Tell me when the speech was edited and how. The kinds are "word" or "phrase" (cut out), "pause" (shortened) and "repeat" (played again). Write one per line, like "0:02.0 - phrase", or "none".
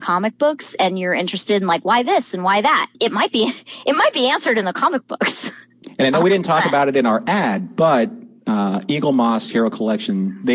0:02.9 - pause